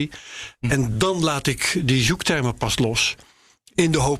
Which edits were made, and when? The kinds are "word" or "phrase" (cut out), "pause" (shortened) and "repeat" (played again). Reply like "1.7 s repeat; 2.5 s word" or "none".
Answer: none